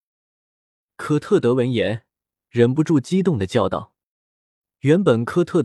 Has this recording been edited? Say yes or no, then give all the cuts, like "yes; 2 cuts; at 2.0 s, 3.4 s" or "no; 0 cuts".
no; 0 cuts